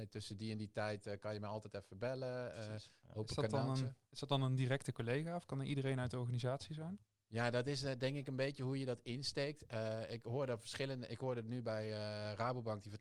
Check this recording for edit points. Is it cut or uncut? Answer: uncut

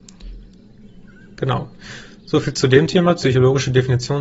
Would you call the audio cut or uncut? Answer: uncut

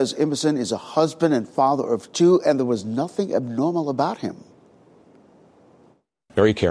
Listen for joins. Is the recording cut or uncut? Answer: uncut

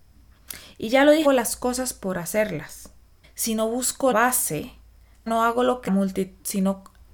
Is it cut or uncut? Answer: cut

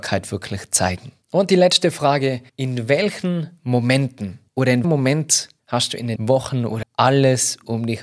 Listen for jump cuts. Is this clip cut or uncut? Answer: cut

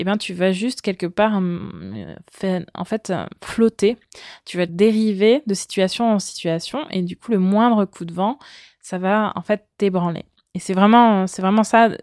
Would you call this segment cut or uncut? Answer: cut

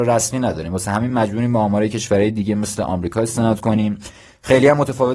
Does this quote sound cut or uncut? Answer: uncut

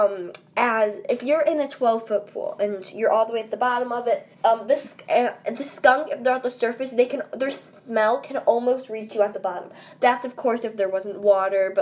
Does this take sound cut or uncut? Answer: cut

